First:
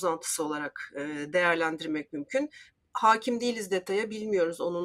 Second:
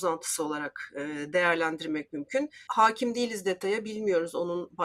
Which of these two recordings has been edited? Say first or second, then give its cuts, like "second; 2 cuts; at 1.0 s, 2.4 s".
second; 1 cut; at 2.7 s